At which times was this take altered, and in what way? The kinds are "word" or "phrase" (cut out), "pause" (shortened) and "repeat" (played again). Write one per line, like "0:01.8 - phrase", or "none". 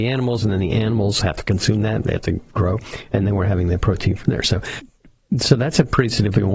none